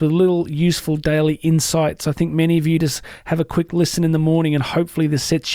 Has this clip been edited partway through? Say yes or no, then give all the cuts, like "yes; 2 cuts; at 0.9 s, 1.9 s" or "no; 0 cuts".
no; 0 cuts